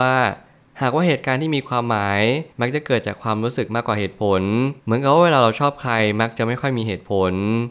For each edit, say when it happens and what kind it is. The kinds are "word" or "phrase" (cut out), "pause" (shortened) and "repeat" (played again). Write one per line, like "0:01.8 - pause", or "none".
0:02.5 - pause
0:04.8 - pause